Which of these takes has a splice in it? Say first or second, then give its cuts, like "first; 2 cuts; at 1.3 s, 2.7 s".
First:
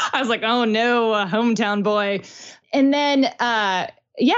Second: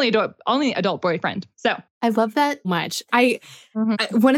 second; 2 cuts; at 1.5 s, 2.6 s